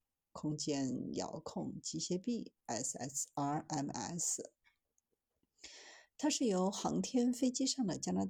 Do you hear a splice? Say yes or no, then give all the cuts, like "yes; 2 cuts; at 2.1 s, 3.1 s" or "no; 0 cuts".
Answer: no; 0 cuts